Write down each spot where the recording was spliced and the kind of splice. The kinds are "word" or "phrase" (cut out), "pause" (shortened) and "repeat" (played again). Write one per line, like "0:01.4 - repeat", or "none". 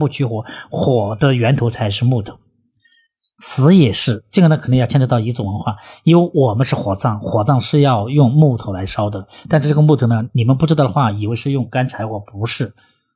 none